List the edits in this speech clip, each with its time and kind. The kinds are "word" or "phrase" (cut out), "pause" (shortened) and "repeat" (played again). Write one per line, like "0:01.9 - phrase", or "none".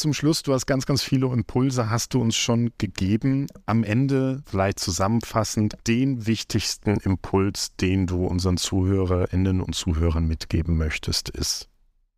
none